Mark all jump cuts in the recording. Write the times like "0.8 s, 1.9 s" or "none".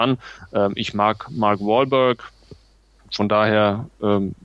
none